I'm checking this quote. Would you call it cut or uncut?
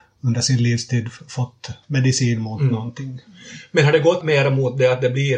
cut